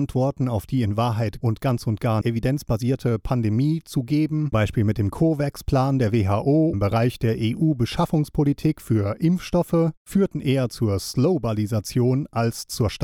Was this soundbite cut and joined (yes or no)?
yes